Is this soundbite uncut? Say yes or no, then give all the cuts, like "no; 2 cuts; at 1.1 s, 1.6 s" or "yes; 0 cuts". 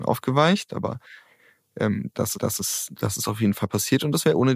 no; 1 cut; at 2.3 s